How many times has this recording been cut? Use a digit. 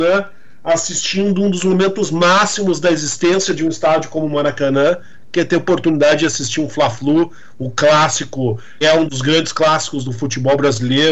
1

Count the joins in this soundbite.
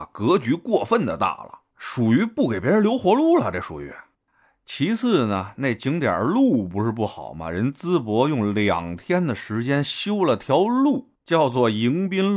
0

